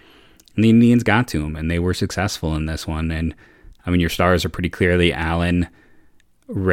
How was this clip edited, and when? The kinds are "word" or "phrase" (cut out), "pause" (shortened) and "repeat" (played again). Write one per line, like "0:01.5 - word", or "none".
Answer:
none